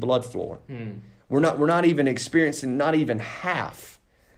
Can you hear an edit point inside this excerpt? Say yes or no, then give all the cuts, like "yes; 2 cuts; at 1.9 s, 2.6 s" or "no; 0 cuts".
no; 0 cuts